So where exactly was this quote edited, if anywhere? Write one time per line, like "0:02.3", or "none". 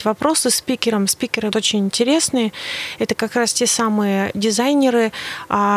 0:01.5